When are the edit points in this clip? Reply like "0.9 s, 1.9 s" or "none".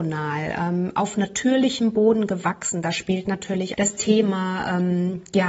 3.7 s

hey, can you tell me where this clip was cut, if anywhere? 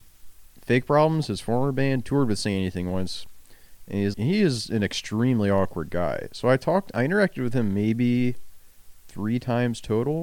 4.1 s

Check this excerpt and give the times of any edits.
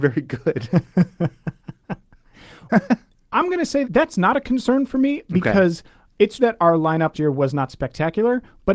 2.7 s, 3.8 s, 6.4 s, 7.1 s

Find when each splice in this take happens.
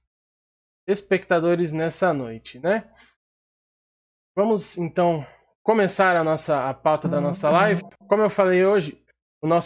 none

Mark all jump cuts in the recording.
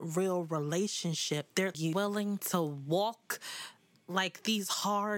1.7 s

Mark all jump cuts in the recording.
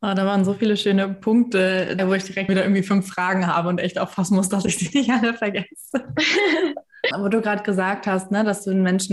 2.0 s, 2.5 s, 7.1 s

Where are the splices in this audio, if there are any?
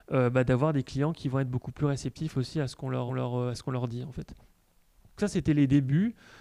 3.1 s, 5.2 s

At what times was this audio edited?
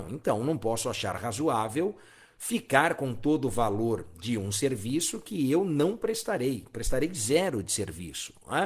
none

